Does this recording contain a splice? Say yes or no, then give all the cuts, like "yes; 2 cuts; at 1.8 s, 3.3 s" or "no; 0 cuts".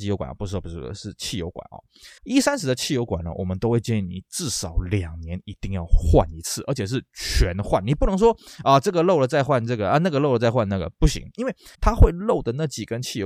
yes; 2 cuts; at 2.2 s, 11.7 s